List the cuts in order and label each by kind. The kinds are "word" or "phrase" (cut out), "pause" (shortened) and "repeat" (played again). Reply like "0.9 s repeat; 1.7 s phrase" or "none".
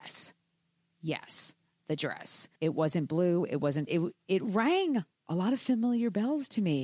2.6 s pause; 3.9 s phrase